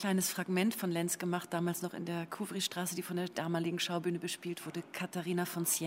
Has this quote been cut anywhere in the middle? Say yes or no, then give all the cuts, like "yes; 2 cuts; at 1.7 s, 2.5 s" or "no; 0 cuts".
no; 0 cuts